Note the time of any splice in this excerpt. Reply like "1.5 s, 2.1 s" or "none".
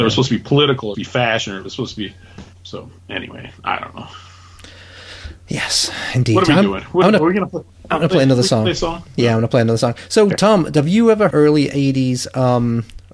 0.9 s, 2.5 s, 11.3 s